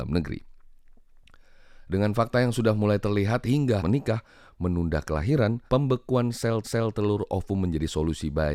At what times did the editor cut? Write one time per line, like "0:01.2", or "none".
0:03.8
0:05.7
0:06.6